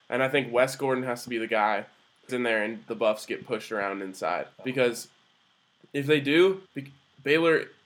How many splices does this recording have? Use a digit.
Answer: 4